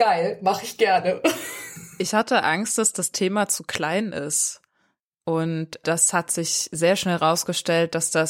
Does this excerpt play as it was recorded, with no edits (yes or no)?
yes